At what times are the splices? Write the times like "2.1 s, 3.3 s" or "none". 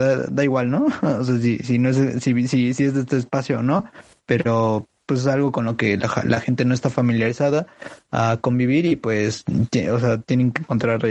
none